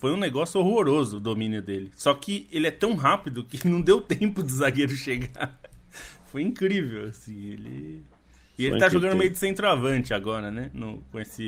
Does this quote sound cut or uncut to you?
uncut